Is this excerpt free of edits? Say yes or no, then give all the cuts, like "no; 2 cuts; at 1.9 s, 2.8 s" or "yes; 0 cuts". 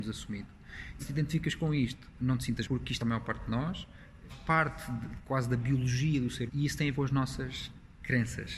no; 6 cuts; at 1.0 s, 2.6 s, 3.0 s, 4.3 s, 6.5 s, 6.9 s